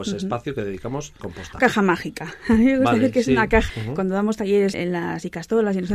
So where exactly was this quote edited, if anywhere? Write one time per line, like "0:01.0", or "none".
0:01.2
0:01.6
0:03.7
0:04.7